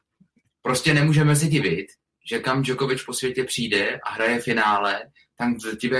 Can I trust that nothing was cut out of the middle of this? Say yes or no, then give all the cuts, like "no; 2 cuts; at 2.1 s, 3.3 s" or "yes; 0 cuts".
yes; 0 cuts